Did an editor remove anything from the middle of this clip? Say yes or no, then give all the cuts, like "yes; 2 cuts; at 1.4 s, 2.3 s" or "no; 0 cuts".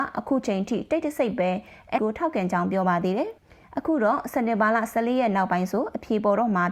yes; 2 cuts; at 2.0 s, 3.4 s